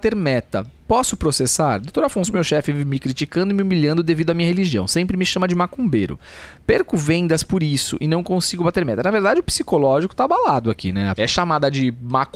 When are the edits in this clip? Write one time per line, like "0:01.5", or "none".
0:11.2

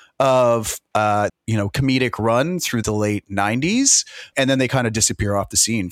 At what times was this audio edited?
0:01.3
0:02.8
0:04.3

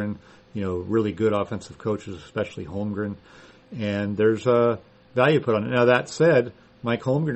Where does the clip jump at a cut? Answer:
none

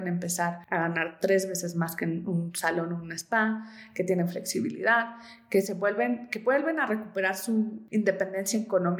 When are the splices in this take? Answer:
none

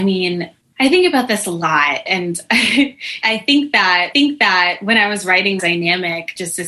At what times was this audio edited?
0:04.1
0:05.6

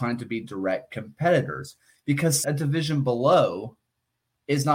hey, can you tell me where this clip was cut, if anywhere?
0:02.4

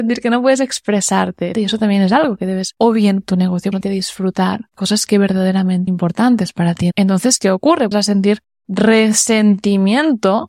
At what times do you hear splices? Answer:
0:01.5
0:02.8
0:03.2
0:03.8
0:04.7
0:05.9
0:07.9

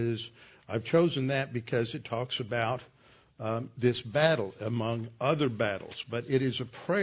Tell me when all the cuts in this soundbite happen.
none

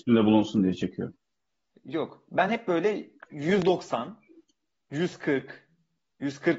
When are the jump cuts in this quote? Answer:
none

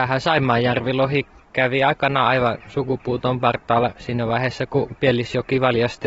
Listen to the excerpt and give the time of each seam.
none

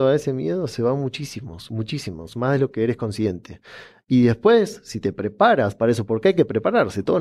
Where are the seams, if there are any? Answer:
none

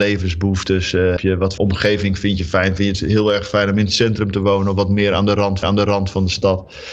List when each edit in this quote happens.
0:01.2
0:01.6
0:05.6

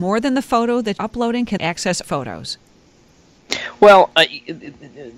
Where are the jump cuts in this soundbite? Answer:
0:01.0
0:01.6
0:02.0

